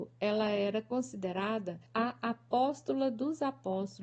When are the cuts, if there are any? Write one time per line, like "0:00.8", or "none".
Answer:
0:01.9

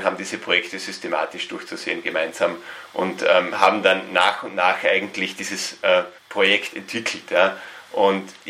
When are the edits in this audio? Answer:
0:06.2

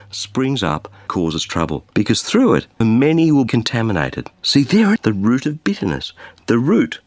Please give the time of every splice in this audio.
0:01.1
0:01.9
0:02.8
0:03.5
0:04.3
0:05.0

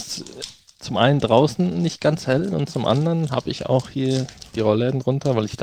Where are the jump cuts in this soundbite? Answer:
none

